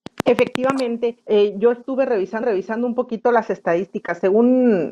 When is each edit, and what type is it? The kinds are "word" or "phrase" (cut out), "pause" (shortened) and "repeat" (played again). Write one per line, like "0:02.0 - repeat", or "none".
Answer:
0:01.2 - pause
0:02.4 - repeat